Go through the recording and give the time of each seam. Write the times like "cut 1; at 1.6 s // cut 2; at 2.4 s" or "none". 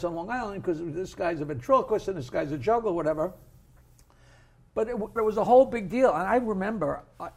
cut 1; at 5.2 s